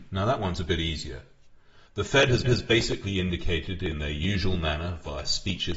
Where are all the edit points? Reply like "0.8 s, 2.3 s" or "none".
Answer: 1.9 s, 2.4 s